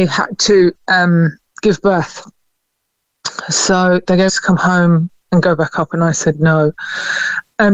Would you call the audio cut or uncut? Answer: cut